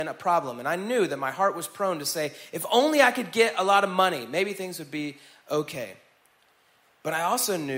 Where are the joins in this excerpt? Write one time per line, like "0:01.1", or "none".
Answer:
none